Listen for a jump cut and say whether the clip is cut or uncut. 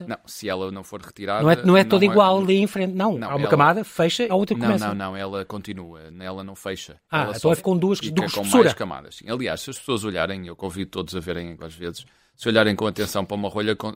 cut